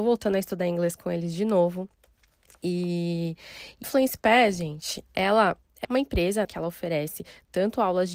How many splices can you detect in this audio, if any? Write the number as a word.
three